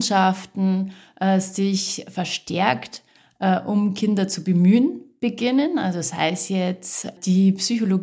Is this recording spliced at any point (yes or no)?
no